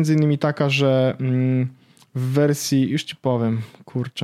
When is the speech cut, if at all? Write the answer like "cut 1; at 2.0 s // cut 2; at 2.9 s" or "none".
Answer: none